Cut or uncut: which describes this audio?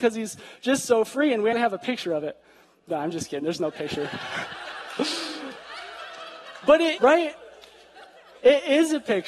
cut